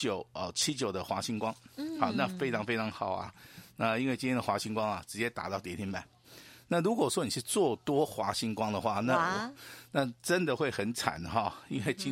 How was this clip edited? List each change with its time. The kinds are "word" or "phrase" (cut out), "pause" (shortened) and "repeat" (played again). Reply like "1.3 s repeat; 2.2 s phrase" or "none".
none